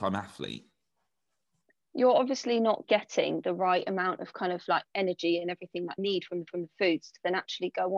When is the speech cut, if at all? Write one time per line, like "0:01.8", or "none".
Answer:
0:02.8
0:06.0
0:06.5